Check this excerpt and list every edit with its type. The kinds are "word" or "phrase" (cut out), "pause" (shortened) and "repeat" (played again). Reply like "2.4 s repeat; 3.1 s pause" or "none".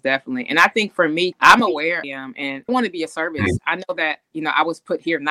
1.3 s word; 2.0 s phrase; 2.7 s word